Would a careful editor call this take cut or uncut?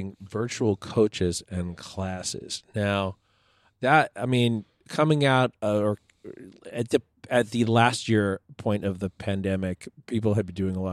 uncut